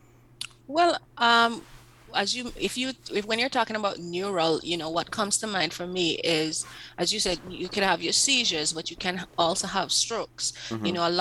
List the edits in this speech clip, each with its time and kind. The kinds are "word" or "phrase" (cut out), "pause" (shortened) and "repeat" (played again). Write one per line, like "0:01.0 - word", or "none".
none